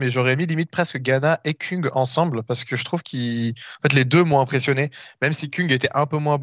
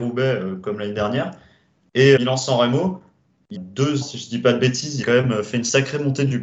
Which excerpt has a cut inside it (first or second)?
second